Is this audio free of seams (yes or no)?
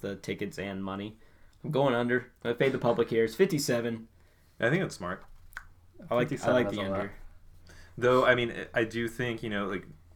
yes